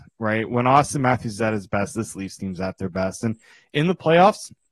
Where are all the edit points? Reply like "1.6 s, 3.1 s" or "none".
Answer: none